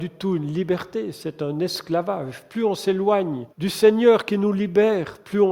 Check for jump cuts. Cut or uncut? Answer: cut